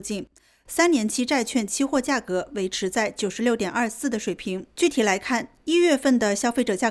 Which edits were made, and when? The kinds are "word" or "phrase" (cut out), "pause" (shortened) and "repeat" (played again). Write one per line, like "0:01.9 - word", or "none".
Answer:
0:04.7 - pause